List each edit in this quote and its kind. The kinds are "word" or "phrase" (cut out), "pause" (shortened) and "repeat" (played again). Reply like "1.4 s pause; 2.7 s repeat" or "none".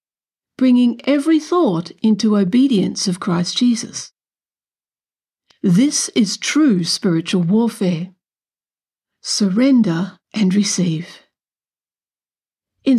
10.2 s pause